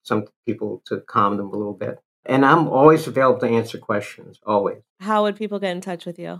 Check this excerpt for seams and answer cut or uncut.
cut